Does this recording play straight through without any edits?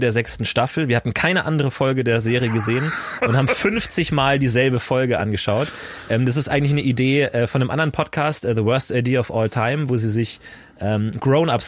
yes; 0 cuts

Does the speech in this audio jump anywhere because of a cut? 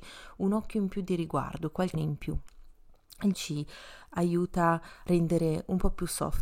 yes; 3 cuts; at 1.9 s, 3.3 s, 5.1 s

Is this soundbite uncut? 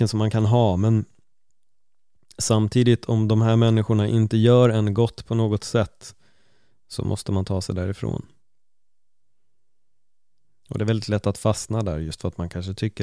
yes; 0 cuts

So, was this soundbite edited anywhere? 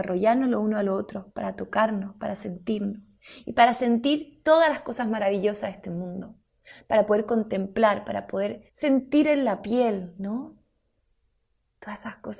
yes; 1 cut; at 8.7 s

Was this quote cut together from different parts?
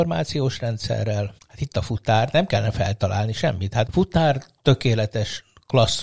yes; 2 cuts; at 1.4 s, 3.9 s

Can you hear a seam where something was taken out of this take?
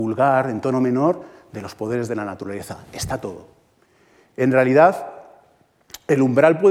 no; 0 cuts

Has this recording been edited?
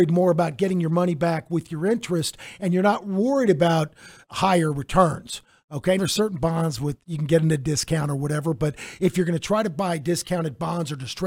yes; 2 cuts; at 4.2 s, 6.0 s

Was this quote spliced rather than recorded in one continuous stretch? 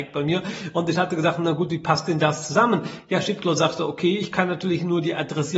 no; 0 cuts

